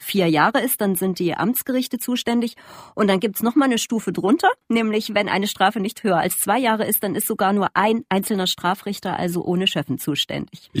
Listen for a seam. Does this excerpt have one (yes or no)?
yes